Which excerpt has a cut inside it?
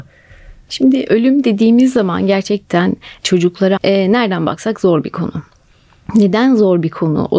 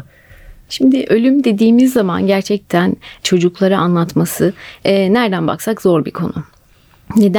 first; 1 cut; at 3.8 s

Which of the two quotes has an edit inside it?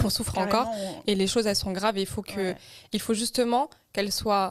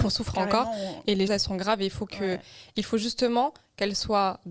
second; 1 cut; at 1.3 s

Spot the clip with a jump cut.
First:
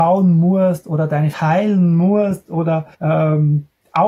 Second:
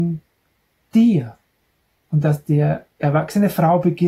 first; 2 cuts; at 1.3 s, 2.9 s

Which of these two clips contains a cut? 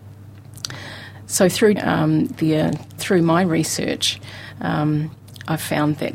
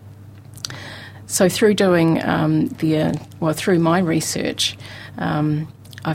first; 2 cuts; at 1.8 s, 3.0 s

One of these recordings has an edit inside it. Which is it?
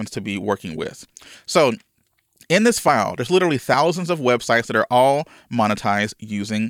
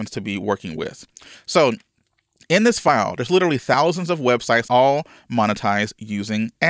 second; 1 cut; at 4.7 s

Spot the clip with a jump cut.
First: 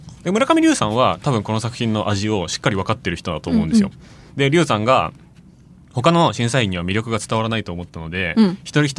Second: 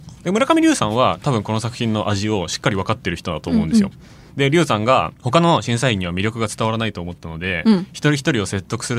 second; 1 cut; at 5.1 s

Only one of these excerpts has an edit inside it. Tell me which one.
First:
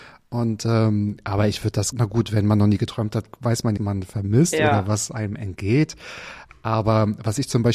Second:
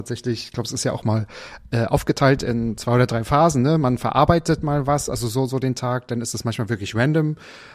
first; 2 cuts; at 1.9 s, 3.8 s

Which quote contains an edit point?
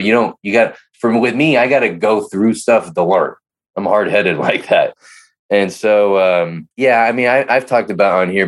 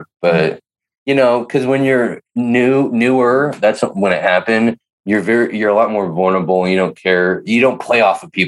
first; 2 cuts; at 3.5 s, 6.7 s

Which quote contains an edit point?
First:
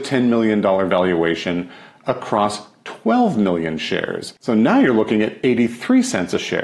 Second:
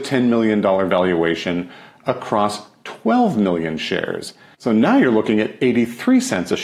first; 1 cut; at 4.4 s

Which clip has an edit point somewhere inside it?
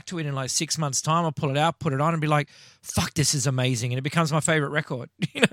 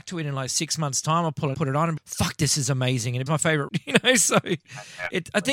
second; 4 cuts; at 1.5 s, 2.0 s, 3.3 s, 3.7 s

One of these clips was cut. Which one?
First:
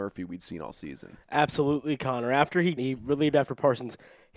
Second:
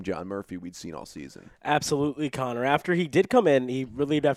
first; 1 cut; at 2.8 s

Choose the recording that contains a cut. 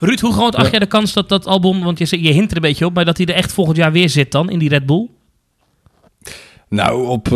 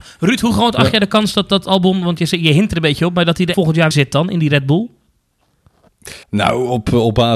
second; 3 cuts; at 3.5 s, 3.9 s, 6.2 s

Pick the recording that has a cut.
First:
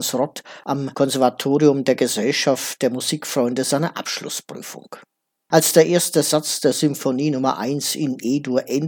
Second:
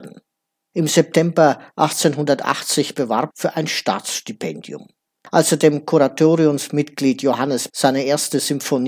second; 2 cuts; at 3.3 s, 7.7 s

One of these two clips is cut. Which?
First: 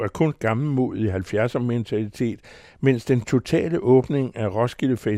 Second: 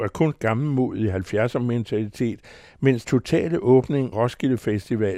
second; 2 cuts; at 3.0 s, 4.1 s

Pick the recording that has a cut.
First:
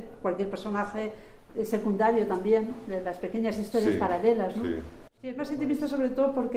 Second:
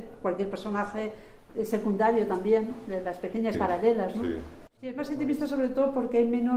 second; 1 cut; at 3.5 s

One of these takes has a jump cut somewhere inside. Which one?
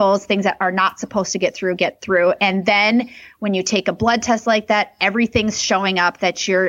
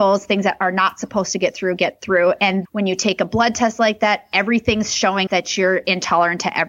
second; 2 cuts; at 2.6 s, 5.3 s

